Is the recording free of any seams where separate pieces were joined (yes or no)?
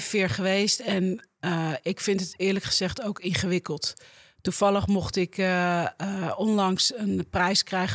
yes